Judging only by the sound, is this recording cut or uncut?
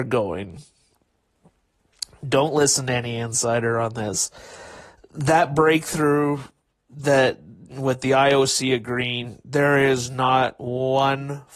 uncut